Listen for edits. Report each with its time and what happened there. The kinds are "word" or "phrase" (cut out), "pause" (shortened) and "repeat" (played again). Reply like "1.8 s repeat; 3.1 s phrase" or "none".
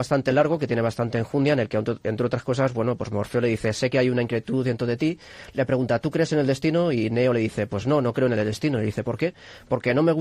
none